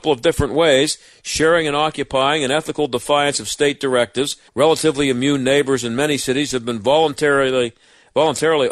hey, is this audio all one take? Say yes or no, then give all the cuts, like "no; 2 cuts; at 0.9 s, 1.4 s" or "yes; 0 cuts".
no; 1 cut; at 4.5 s